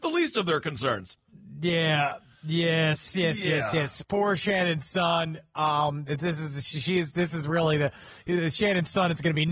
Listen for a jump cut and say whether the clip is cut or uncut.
uncut